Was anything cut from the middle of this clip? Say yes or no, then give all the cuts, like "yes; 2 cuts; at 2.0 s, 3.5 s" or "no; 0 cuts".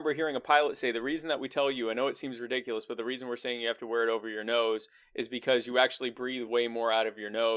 no; 0 cuts